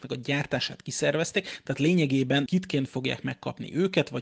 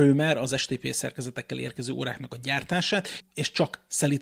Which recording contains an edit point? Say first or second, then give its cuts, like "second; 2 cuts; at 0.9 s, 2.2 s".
first; 1 cut; at 2.5 s